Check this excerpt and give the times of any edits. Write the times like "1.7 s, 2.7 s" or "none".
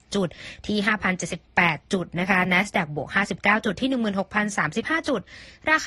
none